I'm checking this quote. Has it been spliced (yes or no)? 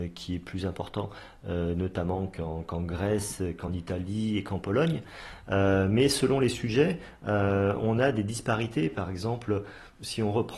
no